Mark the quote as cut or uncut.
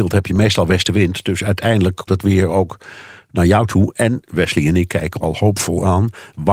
cut